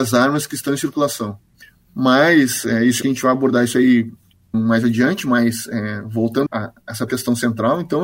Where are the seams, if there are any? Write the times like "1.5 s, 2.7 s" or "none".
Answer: 1.6 s, 3.0 s, 4.5 s, 6.5 s, 7.1 s